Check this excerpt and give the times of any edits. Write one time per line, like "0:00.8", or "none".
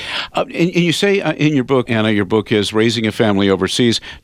0:01.9